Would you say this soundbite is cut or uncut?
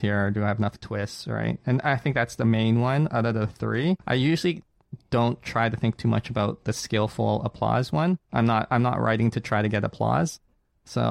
cut